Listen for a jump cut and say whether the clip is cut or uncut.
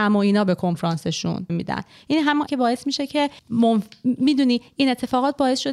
cut